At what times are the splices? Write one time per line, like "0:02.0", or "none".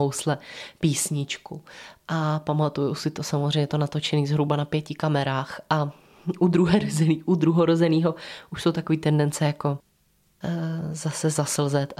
none